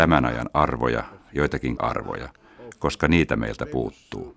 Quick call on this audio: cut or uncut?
cut